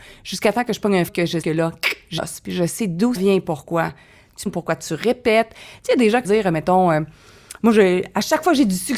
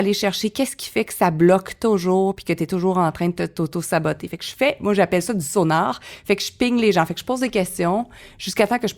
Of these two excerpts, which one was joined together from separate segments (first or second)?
first